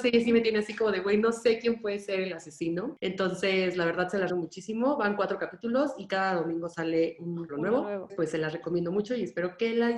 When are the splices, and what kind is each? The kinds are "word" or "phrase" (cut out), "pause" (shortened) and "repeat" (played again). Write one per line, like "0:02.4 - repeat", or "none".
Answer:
0:04.3 - word
0:07.5 - word
0:08.1 - word